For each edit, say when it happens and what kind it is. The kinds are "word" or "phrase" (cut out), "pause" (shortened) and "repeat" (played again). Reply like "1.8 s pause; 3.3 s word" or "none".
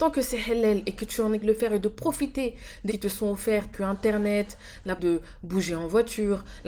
1.4 s word; 2.9 s word; 3.7 s word; 5.0 s word